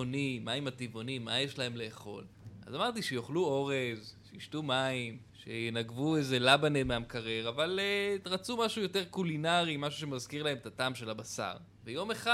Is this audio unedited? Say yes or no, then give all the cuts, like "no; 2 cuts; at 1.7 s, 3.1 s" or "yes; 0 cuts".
yes; 0 cuts